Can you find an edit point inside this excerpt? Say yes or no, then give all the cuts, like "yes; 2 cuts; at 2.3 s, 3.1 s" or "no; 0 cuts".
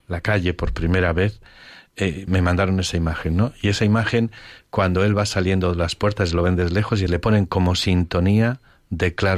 yes; 2 cuts; at 2.3 s, 7.1 s